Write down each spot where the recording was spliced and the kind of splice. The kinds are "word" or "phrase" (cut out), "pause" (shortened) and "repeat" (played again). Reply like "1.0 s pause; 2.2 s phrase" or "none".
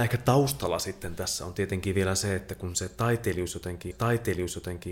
3.9 s repeat

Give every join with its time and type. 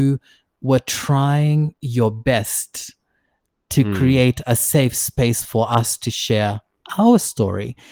none

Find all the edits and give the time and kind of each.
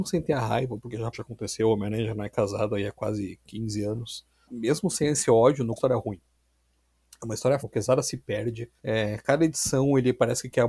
1.1 s word; 5.8 s phrase; 7.6 s word; 8.8 s pause

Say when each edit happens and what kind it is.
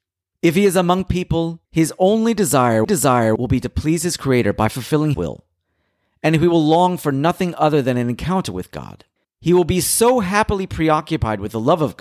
1.6 s pause; 2.9 s repeat; 5.1 s word; 9.2 s pause

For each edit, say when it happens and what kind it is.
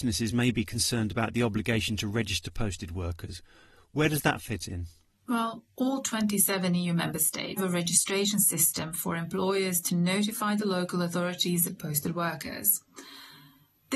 7.6 s word; 11.7 s word

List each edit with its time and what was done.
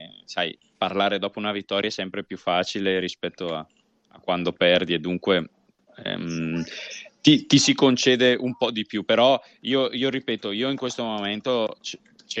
none

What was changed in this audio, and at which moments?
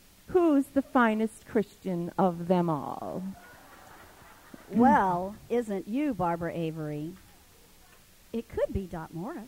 5.5 s word

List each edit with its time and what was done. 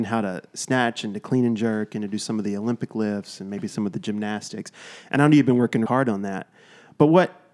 5.9 s word

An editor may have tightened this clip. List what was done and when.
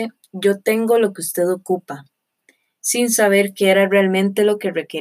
none

